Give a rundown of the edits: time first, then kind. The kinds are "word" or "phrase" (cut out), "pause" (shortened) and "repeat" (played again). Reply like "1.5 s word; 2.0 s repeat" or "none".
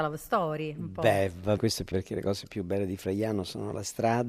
1.6 s word; 1.9 s word